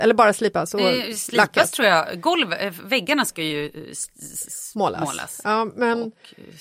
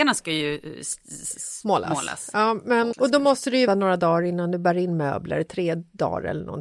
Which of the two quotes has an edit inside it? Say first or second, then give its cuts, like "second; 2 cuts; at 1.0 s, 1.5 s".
second; 2 cuts; at 2.9 s, 3.7 s